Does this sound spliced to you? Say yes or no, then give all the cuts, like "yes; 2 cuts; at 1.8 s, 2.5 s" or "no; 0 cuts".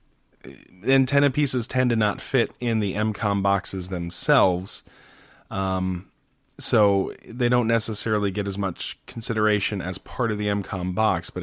no; 0 cuts